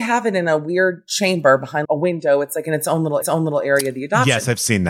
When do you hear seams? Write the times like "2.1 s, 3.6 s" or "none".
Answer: 1.8 s, 3.2 s